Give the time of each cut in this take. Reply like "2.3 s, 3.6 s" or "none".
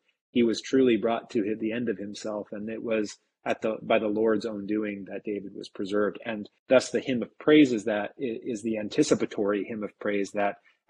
6.6 s